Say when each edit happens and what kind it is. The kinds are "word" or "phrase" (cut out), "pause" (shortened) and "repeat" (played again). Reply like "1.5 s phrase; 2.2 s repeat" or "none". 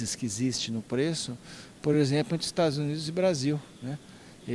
none